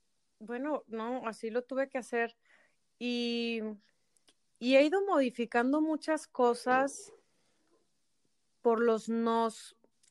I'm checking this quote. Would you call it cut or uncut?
uncut